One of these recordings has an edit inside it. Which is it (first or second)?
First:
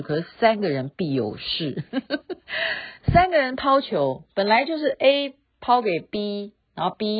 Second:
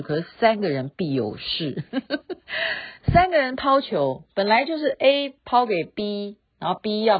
second